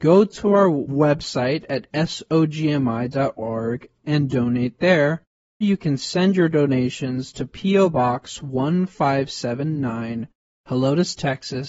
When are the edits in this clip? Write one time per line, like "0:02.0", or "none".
0:05.6